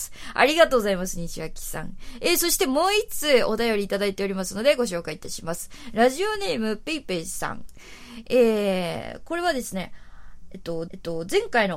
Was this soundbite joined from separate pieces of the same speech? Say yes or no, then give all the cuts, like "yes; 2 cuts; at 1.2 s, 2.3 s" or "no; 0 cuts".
yes; 1 cut; at 10.9 s